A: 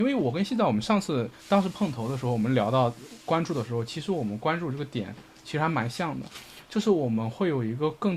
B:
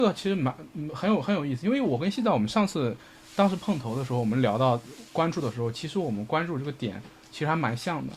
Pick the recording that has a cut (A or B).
A